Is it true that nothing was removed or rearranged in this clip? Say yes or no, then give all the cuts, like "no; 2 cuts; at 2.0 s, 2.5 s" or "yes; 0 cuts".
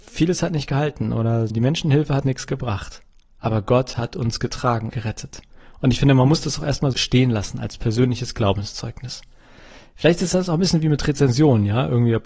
no; 4 cuts; at 1.5 s, 2.2 s, 4.9 s, 6.9 s